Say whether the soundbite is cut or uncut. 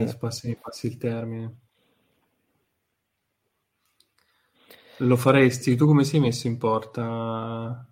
uncut